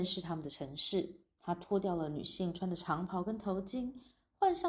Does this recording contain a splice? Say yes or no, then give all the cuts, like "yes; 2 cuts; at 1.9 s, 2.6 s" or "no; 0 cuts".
yes; 1 cut; at 1.3 s